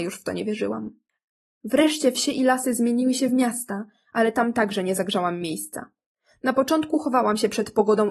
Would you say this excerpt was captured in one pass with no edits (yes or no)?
yes